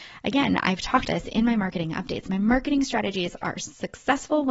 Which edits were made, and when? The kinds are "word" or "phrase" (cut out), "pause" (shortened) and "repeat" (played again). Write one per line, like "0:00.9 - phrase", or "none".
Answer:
0:01.0 - word